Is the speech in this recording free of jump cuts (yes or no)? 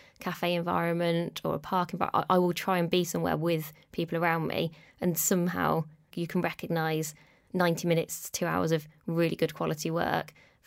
yes